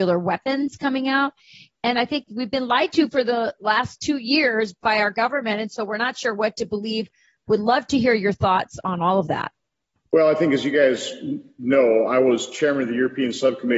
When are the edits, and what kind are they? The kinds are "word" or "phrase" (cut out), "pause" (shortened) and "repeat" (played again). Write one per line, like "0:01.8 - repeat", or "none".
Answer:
none